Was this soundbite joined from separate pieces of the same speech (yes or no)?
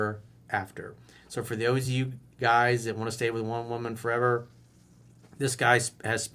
no